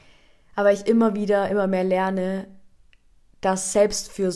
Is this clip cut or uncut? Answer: uncut